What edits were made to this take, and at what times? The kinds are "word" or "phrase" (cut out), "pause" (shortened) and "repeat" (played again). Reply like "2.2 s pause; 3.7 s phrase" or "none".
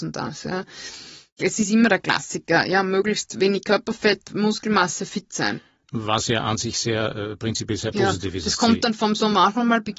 none